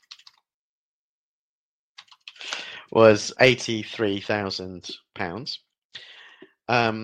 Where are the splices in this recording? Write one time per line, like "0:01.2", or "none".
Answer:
0:03.3